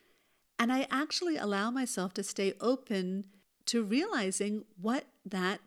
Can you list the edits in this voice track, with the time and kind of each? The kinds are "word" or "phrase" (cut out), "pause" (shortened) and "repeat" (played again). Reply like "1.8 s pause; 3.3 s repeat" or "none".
none